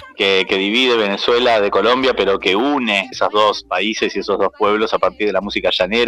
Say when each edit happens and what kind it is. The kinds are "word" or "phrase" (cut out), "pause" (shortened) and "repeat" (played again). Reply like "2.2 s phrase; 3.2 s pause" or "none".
3.1 s word